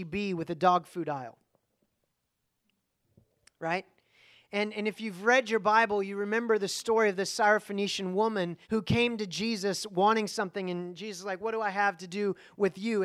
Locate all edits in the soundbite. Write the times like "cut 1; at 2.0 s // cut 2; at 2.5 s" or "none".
cut 1; at 8.6 s